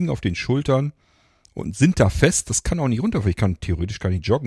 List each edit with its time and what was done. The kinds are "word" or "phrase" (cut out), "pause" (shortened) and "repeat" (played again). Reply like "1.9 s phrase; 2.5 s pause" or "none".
none